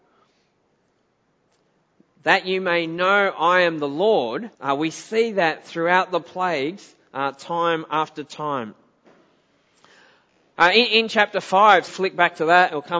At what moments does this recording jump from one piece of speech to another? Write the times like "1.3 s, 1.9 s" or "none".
4.5 s, 11.9 s